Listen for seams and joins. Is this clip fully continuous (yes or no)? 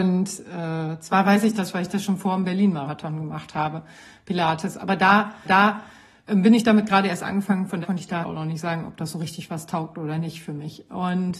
no